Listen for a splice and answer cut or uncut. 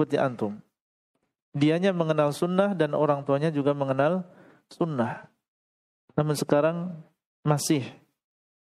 uncut